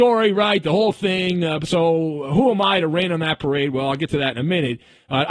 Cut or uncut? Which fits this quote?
uncut